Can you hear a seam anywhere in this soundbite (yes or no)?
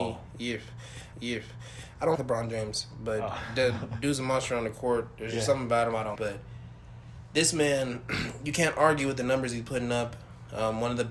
yes